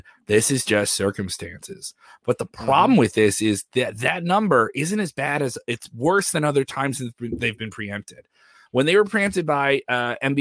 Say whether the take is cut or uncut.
uncut